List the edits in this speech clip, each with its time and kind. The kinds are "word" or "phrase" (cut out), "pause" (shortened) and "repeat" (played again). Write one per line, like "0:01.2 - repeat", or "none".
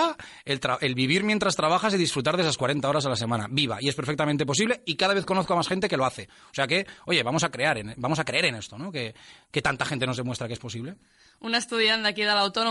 none